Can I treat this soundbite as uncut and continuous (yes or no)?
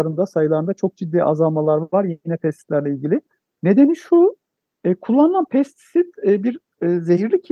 yes